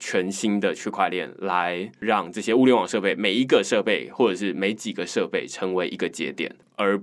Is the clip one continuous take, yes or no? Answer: yes